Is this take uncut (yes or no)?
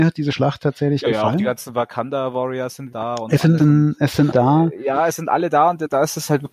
no